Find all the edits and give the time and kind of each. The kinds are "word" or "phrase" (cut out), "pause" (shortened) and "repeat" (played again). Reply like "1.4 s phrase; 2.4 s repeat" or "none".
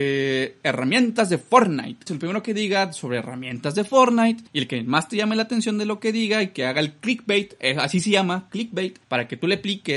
4.5 s pause; 9.0 s pause